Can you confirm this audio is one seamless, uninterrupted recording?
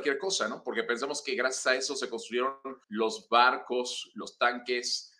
no; 1 cut; at 2.8 s

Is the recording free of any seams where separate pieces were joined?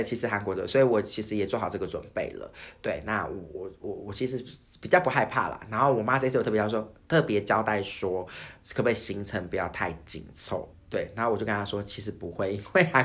no; 1 cut; at 10.7 s

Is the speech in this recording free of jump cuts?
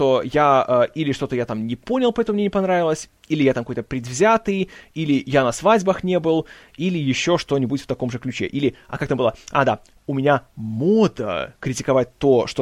yes; 0 cuts

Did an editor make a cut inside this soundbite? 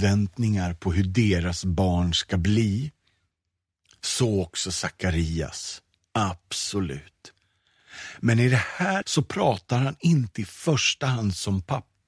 yes; 1 cut; at 9.0 s

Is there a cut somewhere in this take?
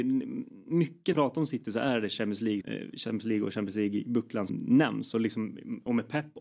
yes; 3 cuts; at 1.1 s, 2.6 s, 4.5 s

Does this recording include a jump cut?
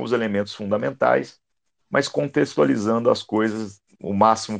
no; 0 cuts

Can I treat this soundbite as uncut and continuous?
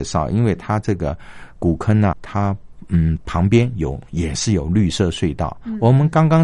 no; 1 cut; at 2.1 s

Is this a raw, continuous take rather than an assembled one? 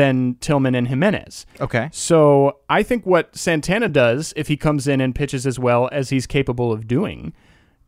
yes; 0 cuts

